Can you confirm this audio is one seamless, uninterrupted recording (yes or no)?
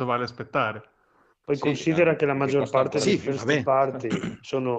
yes